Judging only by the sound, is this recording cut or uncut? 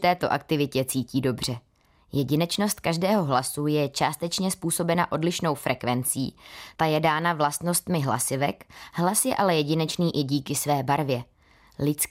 uncut